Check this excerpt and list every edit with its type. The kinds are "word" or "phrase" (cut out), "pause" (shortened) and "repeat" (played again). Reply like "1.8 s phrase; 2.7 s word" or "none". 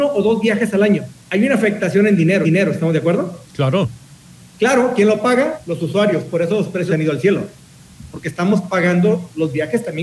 1.2 s pause; 2.4 s repeat; 6.9 s word